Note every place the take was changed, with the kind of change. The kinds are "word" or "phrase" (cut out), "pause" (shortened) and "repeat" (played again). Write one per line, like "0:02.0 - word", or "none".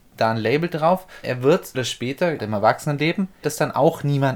0:01.2 - word
0:01.7 - word
0:02.4 - word
0:03.4 - word